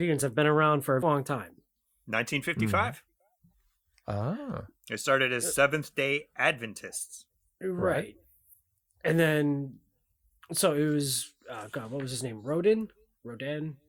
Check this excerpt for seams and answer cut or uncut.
cut